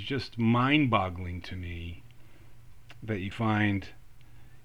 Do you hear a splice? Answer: yes; 1 cut; at 3.3 s

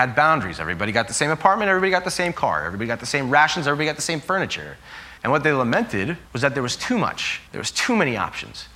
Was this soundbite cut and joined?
yes; 3 cuts; at 5.2 s, 6.3 s, 7.5 s

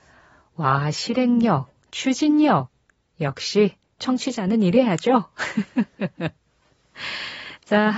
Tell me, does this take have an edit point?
yes; 1 cut; at 4.0 s

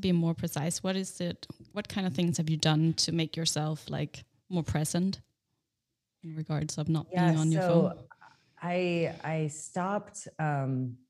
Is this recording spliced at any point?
no; 0 cuts

